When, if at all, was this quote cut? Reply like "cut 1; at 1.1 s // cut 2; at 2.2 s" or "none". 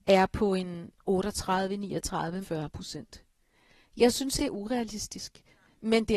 cut 1; at 2.4 s // cut 2; at 4.4 s

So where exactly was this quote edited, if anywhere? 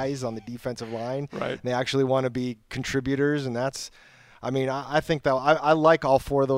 none

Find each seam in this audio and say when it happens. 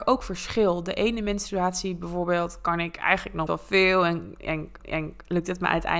cut 1; at 3.5 s // cut 2; at 4.8 s

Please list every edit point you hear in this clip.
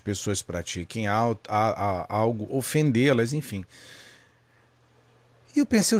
none

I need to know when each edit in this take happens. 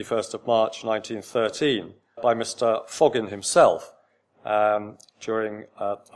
cut 1; at 2.2 s

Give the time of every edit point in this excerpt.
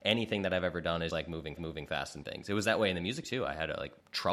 cut 1; at 1.1 s // cut 2; at 1.6 s // cut 3; at 2.2 s // cut 4; at 3.2 s

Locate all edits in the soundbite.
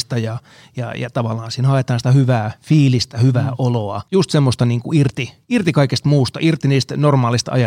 cut 1; at 4.1 s // cut 2; at 5.4 s

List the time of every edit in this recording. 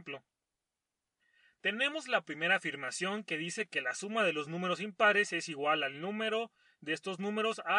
none

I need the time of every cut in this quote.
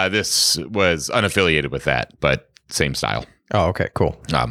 none

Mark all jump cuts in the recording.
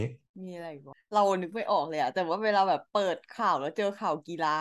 cut 1; at 2.9 s

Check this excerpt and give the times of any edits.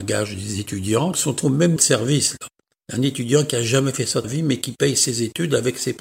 cut 1; at 1.1 s // cut 2; at 1.8 s // cut 3; at 4.2 s

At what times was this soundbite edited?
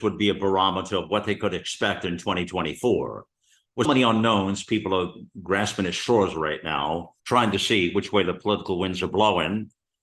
cut 1; at 3.8 s // cut 2; at 7.2 s

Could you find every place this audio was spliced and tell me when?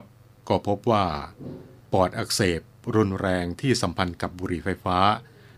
none

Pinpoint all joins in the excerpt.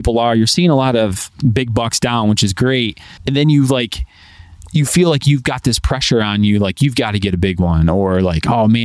cut 1; at 3.2 s

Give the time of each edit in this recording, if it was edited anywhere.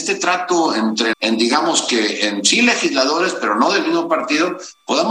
cut 1; at 1.1 s

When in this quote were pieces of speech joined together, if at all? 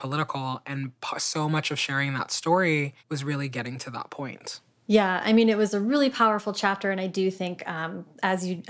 cut 1; at 3.0 s

